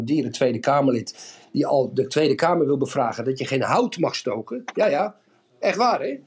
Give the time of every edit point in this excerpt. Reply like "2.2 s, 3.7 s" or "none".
none